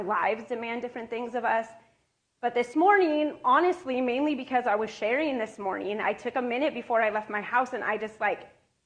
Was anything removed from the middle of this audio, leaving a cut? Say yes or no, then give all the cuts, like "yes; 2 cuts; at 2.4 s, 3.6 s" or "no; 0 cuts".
no; 0 cuts